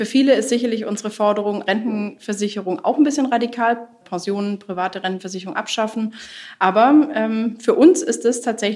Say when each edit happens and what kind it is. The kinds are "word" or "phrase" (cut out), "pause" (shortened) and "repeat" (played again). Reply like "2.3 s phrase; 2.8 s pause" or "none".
1.7 s phrase; 4.0 s word